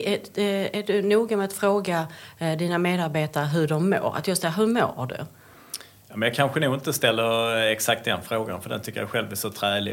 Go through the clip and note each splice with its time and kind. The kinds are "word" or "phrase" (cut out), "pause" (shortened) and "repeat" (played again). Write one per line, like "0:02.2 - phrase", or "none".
none